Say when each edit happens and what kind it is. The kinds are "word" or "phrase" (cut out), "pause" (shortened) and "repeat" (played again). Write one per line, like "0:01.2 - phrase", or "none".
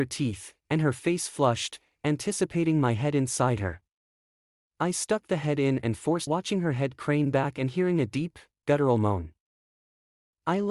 0:06.3 - phrase